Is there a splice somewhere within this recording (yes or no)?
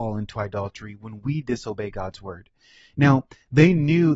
no